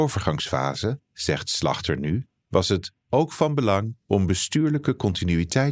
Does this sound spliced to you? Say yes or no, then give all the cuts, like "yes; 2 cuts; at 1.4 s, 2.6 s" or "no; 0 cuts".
no; 0 cuts